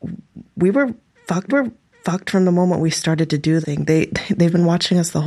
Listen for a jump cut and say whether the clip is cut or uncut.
cut